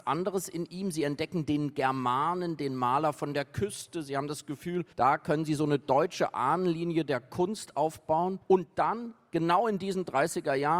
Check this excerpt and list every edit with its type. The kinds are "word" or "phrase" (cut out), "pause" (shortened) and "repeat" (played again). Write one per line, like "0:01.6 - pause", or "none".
0:04.9 - pause
0:08.4 - pause